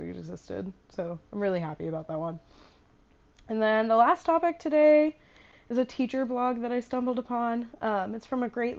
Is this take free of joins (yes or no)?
yes